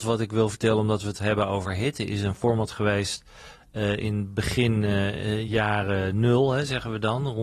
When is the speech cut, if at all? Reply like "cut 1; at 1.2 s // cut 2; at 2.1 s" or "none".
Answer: none